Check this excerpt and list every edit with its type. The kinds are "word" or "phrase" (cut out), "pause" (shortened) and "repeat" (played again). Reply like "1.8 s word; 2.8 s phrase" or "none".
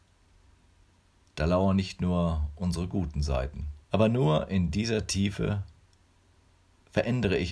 3.8 s pause

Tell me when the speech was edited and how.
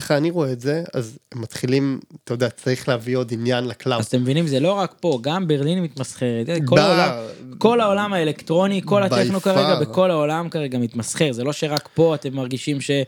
none

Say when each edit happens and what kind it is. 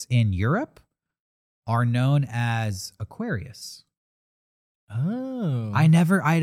none

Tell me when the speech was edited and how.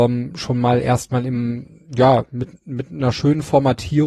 none

